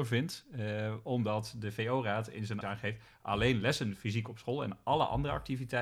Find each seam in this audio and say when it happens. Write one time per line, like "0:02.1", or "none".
0:02.6